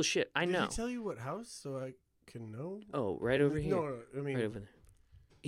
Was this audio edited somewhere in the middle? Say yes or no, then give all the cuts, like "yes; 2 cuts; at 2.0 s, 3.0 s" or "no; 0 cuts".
no; 0 cuts